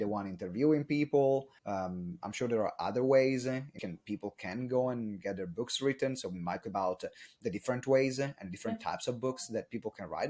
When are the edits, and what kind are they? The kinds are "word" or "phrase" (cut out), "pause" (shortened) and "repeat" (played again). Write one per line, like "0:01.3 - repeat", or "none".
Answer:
0:01.6 - pause
0:03.8 - word
0:06.6 - word